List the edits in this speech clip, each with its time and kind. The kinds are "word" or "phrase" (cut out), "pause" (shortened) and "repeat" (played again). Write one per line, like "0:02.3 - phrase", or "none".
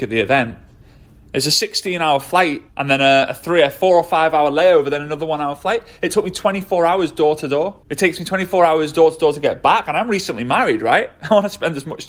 0:02.7 - pause
0:07.8 - pause